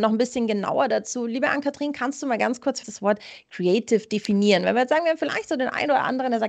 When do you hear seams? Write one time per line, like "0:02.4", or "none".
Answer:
0:02.8